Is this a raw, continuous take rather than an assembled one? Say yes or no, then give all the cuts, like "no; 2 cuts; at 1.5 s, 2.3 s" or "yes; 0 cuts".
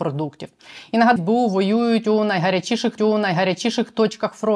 no; 2 cuts; at 1.2 s, 3.0 s